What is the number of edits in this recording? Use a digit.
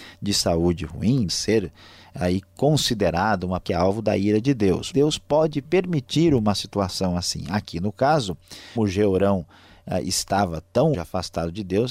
5